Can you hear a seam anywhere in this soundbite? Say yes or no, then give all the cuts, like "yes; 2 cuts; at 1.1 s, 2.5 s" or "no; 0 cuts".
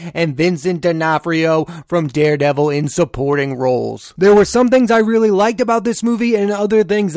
no; 0 cuts